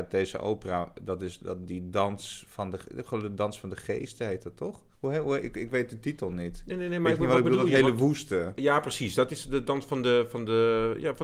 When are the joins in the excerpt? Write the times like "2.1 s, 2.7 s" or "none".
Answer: 4.9 s